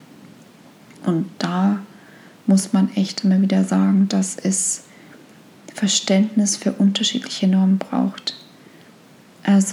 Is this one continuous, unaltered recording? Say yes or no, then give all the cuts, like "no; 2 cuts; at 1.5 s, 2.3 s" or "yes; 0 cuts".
yes; 0 cuts